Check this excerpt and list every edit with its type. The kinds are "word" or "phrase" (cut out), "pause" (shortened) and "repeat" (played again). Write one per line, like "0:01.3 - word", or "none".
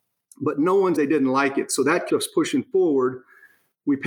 0:00.9 - word
0:02.1 - word